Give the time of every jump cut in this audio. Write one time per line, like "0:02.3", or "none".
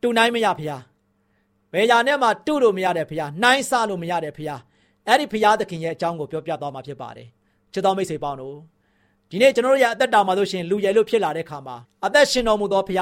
0:11.8